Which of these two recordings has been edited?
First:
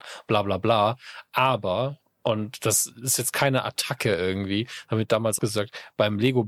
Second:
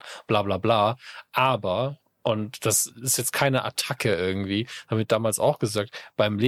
first; 1 cut; at 5.4 s

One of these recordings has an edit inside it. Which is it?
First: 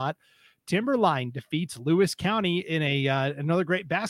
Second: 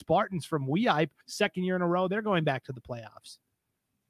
second; 1 cut; at 1.2 s

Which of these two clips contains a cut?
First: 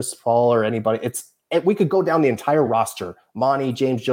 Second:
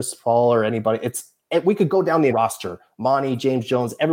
second; 1 cut; at 2.3 s

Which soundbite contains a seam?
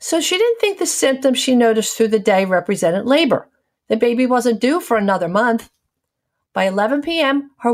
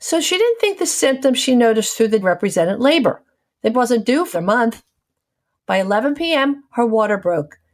second; 3 cuts; at 2.2 s, 3.7 s, 4.3 s

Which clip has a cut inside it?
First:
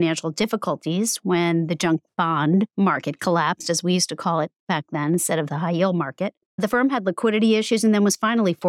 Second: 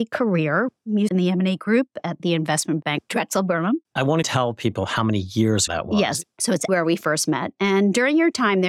second; 5 cuts; at 1.1 s, 3.8 s, 4.2 s, 5.7 s, 6.7 s

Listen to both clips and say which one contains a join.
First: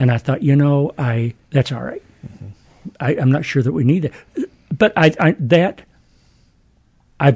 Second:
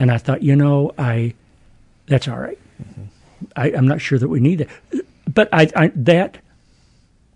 first; 1 cut; at 1.4 s

